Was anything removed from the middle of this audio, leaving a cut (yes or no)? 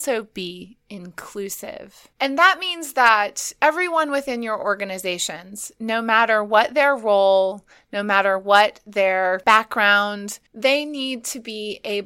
yes